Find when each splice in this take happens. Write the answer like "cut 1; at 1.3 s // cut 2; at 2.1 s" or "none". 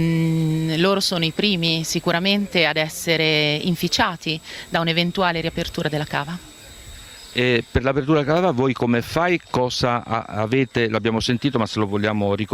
none